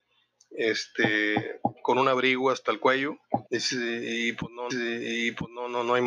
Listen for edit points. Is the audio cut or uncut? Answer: cut